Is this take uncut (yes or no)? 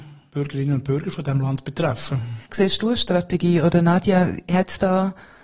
no